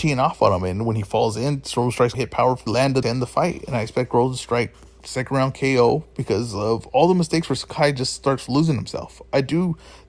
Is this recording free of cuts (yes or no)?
no